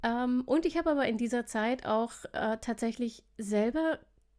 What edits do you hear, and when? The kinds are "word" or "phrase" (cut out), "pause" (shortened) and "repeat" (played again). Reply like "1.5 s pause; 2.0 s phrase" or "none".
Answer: none